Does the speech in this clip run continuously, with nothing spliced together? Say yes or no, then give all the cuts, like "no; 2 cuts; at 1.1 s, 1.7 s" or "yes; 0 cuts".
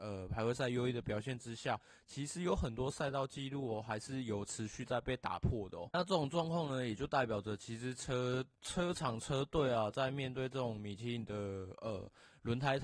no; 1 cut; at 8.6 s